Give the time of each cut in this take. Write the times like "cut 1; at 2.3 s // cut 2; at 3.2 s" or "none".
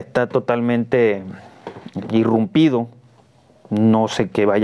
cut 1; at 2.0 s